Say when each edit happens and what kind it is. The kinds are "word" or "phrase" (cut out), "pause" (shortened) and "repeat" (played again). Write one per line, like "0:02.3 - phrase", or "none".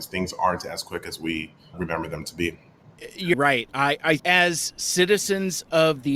0:01.7 - word
0:03.3 - word
0:04.2 - word